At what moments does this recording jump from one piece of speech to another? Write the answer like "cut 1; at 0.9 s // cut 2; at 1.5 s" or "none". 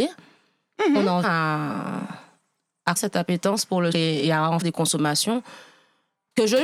cut 1; at 1.2 s // cut 2; at 3.0 s // cut 3; at 3.9 s // cut 4; at 4.6 s